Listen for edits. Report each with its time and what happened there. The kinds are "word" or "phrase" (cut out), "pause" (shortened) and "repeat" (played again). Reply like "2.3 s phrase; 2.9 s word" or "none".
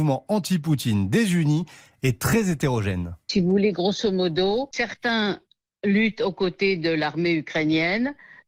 none